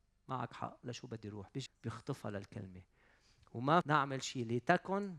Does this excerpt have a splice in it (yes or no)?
yes